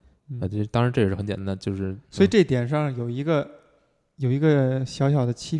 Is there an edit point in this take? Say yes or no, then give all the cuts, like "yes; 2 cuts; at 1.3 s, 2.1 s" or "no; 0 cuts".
yes; 1 cut; at 2.0 s